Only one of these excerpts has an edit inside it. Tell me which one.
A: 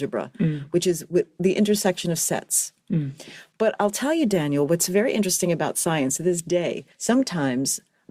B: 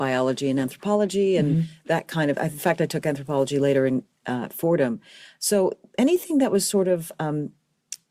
A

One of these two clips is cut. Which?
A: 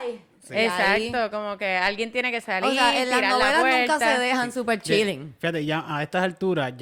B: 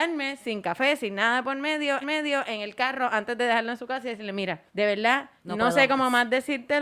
B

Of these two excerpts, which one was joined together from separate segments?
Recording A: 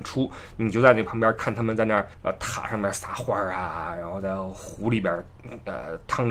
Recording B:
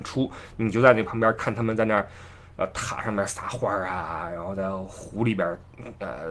A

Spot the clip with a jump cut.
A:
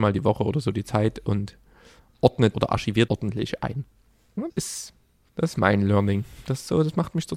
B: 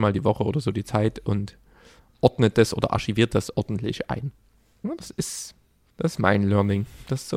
A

